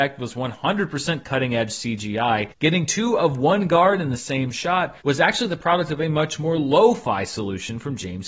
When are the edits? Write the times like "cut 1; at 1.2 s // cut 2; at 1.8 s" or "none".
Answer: cut 1; at 5.0 s

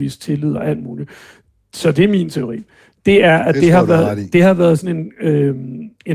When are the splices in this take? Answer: none

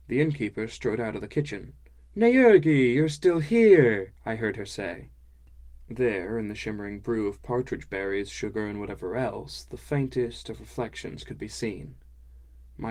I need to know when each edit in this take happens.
none

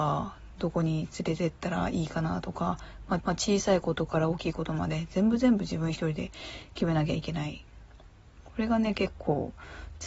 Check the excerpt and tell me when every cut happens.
cut 1; at 3.2 s

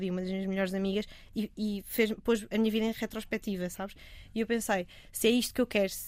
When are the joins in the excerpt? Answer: none

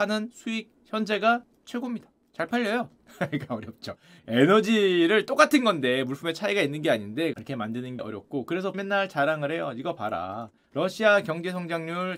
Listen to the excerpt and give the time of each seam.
cut 1; at 7.3 s // cut 2; at 8.0 s // cut 3; at 8.7 s

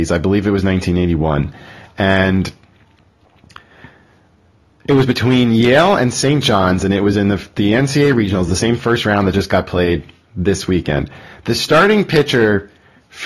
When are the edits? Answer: none

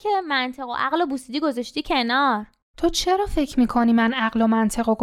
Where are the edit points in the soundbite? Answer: none

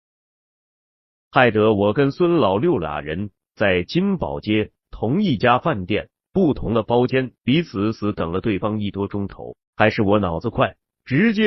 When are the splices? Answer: cut 1; at 7.4 s // cut 2; at 9.6 s

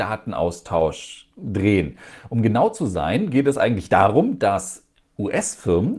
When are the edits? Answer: none

